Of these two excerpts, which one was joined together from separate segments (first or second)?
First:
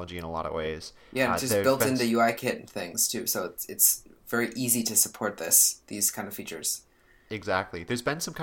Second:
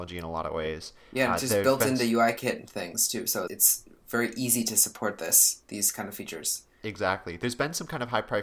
second